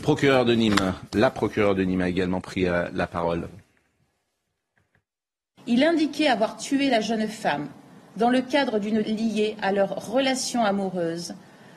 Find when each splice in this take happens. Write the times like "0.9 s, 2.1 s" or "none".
9.0 s